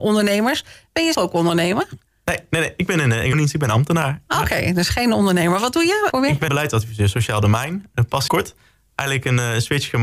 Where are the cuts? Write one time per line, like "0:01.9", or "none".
0:01.1
0:03.3
0:06.1
0:06.5
0:08.3